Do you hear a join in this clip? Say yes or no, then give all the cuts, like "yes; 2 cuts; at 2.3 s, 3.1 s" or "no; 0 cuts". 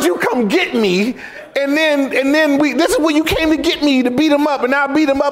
no; 0 cuts